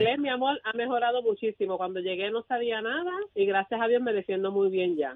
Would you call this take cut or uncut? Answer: cut